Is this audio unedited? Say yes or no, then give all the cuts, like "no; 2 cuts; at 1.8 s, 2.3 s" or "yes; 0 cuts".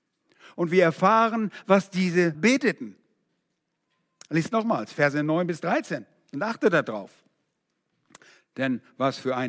no; 1 cut; at 2.3 s